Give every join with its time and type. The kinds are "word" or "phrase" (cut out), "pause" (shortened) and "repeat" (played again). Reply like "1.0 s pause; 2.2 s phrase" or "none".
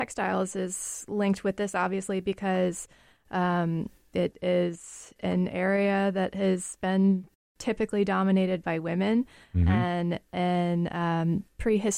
none